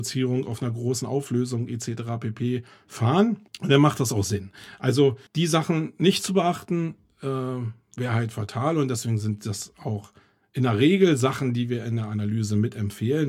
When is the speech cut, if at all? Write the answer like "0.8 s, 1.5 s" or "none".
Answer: 3.5 s, 5.3 s